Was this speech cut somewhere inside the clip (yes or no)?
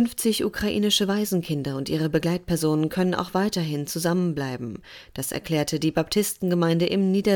no